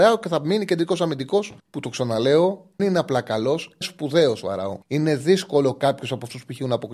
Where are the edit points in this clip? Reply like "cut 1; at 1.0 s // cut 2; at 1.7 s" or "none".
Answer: cut 1; at 1.6 s // cut 2; at 2.8 s // cut 3; at 3.8 s // cut 4; at 4.8 s